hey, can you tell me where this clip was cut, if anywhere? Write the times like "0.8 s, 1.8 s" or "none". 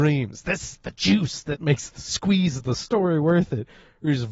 none